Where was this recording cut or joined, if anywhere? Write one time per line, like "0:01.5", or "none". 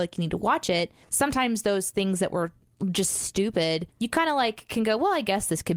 none